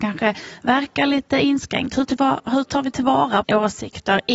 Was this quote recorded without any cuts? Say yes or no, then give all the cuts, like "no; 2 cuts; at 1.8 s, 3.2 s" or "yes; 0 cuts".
no; 2 cuts; at 2.1 s, 3.4 s